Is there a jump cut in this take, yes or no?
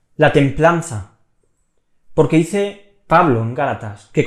no